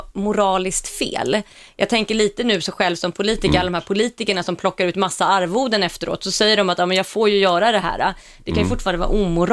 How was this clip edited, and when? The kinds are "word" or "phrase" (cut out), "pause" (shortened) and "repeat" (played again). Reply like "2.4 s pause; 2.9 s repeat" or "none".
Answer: none